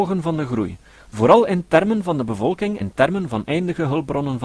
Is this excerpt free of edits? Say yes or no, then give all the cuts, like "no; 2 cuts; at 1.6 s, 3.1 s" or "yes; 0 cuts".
no; 1 cut; at 2.8 s